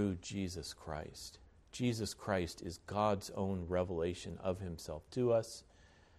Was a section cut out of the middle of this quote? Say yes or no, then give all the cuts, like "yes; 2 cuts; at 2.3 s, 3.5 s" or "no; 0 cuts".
yes; 1 cut; at 1.5 s